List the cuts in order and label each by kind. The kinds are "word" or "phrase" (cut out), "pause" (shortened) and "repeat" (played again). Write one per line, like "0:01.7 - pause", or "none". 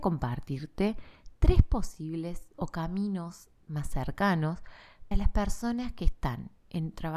0:02.5 - word
0:05.1 - word